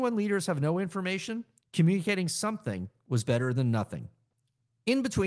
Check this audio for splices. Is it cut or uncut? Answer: uncut